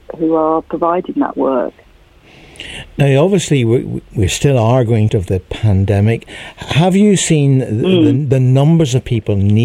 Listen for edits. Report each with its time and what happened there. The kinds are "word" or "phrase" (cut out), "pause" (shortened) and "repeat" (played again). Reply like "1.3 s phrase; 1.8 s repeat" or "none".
5.1 s phrase